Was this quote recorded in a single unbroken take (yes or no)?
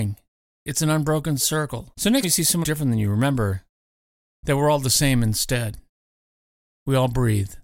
no